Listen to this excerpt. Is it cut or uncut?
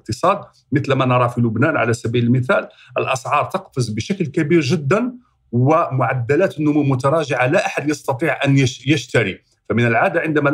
uncut